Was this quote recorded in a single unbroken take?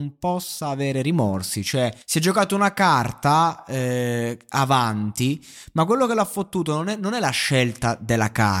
no; 1 cut; at 2.0 s

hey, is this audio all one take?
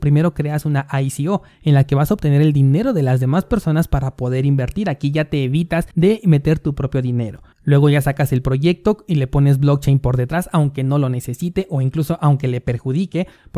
no; 2 cuts; at 5.9 s, 7.5 s

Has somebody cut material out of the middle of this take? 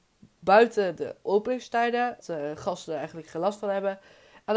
yes; 1 cut; at 2.2 s

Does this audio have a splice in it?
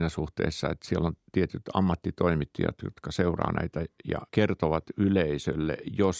yes; 1 cut; at 4.3 s

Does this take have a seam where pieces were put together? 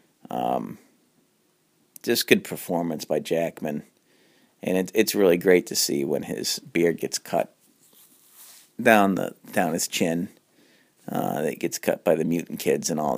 no; 0 cuts

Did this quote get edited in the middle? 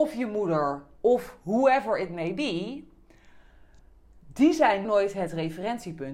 yes; 1 cut; at 4.8 s

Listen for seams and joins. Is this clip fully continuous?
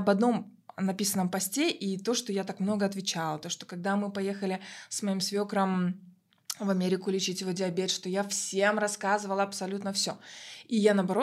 yes; 0 cuts

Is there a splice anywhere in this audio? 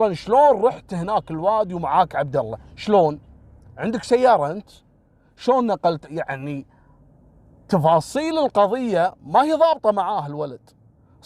no; 0 cuts

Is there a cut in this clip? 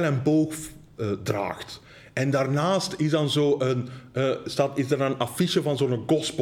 no; 0 cuts

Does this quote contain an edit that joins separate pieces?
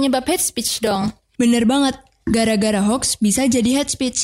no; 0 cuts

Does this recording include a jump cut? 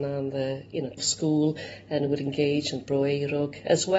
yes; 1 cut; at 1.0 s

